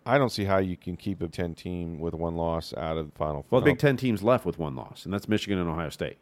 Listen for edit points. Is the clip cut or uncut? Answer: cut